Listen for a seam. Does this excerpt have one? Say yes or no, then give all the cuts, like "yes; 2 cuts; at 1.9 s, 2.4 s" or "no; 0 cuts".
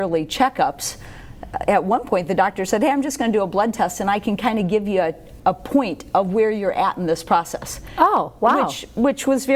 no; 0 cuts